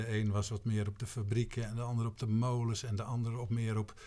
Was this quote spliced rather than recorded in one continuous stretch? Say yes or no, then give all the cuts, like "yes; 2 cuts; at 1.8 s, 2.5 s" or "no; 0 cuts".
no; 0 cuts